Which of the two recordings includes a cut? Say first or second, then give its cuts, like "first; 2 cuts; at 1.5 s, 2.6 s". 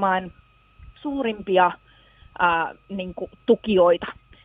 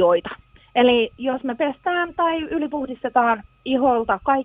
first; 1 cut; at 0.9 s